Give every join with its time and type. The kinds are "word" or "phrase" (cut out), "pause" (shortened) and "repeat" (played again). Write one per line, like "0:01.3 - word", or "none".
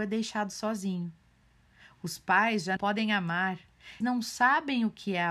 0:02.8 - word
0:04.0 - word